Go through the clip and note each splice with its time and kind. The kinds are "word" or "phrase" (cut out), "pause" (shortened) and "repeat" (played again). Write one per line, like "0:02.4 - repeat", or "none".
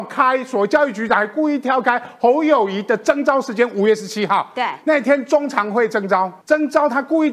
0:06.4 - pause